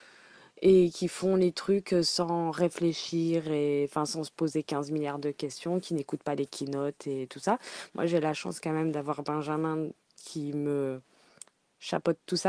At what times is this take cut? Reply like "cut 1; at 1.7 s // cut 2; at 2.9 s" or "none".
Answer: none

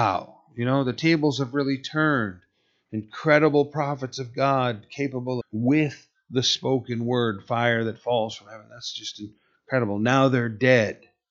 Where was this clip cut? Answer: cut 1; at 5.4 s

